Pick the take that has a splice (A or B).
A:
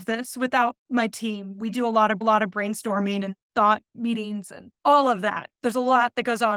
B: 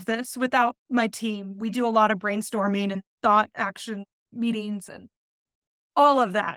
A